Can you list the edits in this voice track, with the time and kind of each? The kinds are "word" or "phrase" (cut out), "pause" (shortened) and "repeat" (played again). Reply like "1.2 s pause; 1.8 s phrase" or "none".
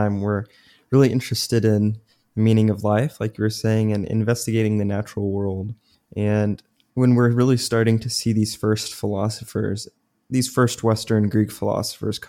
none